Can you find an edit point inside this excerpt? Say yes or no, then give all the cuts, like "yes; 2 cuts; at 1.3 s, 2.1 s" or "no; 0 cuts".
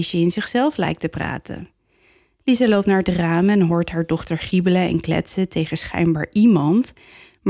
no; 0 cuts